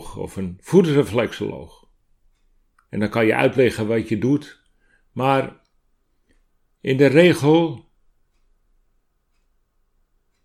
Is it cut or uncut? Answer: uncut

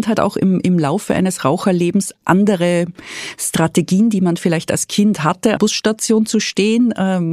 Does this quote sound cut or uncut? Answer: cut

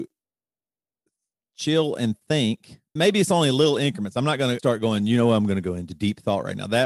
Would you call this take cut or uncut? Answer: cut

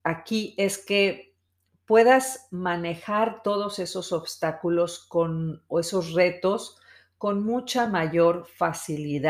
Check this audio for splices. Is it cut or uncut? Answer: uncut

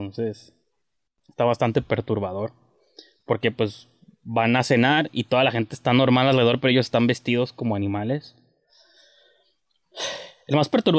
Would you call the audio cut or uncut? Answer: uncut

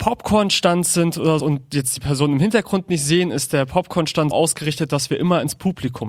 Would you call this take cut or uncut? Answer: cut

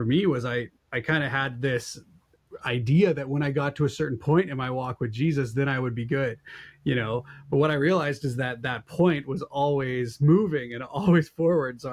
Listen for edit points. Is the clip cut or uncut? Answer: uncut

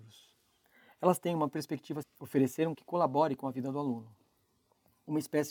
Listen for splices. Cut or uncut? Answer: cut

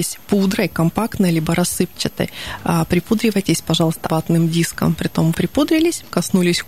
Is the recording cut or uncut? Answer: cut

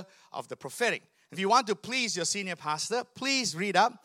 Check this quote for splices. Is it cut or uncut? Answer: cut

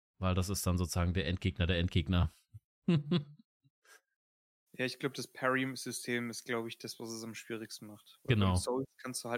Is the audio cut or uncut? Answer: uncut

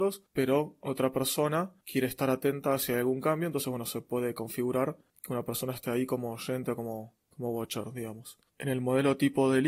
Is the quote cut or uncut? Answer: uncut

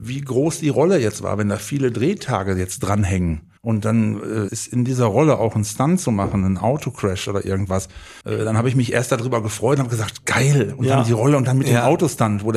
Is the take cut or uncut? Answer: cut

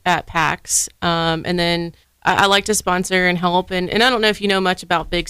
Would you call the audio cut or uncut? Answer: cut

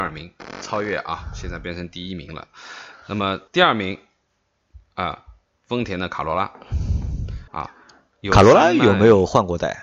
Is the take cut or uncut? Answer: cut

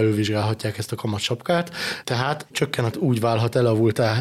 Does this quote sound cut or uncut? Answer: cut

